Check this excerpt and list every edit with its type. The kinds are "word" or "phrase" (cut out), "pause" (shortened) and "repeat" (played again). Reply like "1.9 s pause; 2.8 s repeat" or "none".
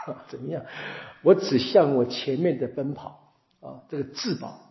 none